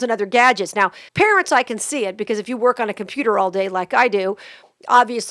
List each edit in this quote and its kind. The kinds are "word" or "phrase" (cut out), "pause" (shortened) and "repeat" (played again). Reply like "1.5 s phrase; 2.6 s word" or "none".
1.1 s pause